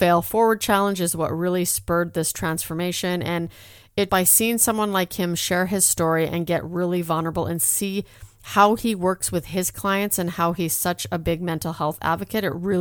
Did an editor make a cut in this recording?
yes; 1 cut; at 4.1 s

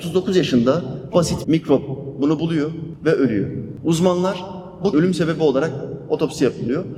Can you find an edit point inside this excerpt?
yes; 3 cuts; at 1.1 s, 1.4 s, 4.9 s

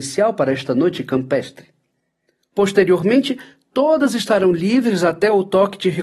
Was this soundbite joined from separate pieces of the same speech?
no; 0 cuts

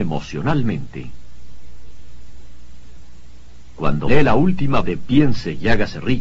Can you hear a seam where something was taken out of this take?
yes; 2 cuts; at 4.1 s, 4.8 s

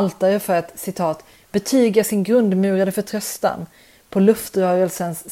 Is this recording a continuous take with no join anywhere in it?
yes; 0 cuts

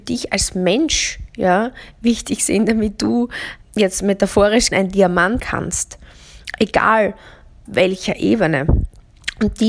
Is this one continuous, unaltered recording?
no; 4 cuts; at 3.6 s, 4.7 s, 5.4 s, 7.7 s

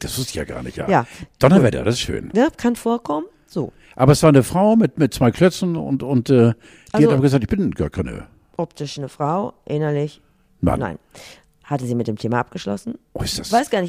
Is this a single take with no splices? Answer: yes; 0 cuts

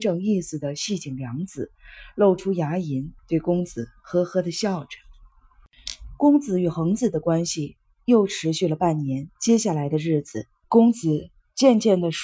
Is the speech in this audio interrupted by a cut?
yes; 3 cuts; at 3.2 s, 9.4 s, 10.6 s

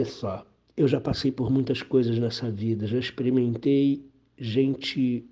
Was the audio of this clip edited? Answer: no; 0 cuts

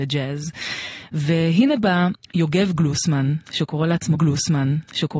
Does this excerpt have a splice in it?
yes; 2 cuts; at 2.2 s, 4.1 s

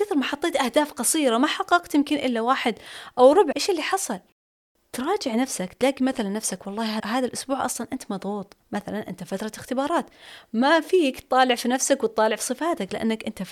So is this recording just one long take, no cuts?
no; 4 cuts; at 3.5 s, 4.7 s, 7.0 s, 8.6 s

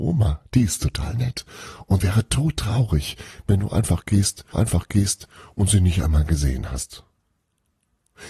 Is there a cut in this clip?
yes; 2 cuts; at 2.0 s, 4.5 s

